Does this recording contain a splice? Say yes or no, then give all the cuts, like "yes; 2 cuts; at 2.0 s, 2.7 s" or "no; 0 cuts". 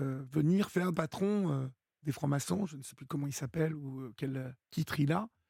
yes; 1 cut; at 0.9 s